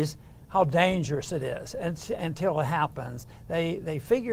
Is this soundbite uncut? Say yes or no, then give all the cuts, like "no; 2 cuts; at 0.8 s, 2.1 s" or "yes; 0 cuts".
yes; 0 cuts